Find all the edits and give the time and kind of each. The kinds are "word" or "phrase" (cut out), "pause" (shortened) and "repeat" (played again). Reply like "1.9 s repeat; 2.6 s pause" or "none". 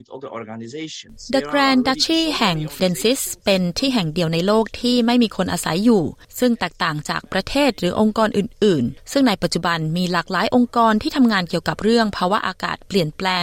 2.8 s phrase